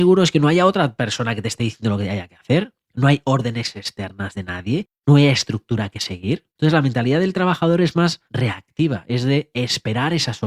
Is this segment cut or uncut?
cut